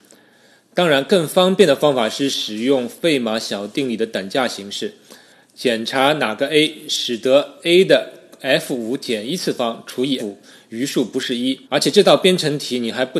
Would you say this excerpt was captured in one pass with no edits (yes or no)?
no